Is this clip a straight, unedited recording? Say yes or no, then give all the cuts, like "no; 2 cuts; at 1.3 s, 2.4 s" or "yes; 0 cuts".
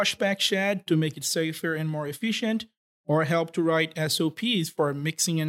yes; 0 cuts